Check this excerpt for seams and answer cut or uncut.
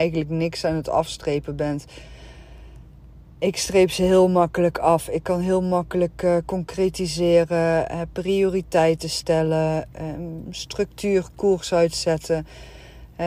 uncut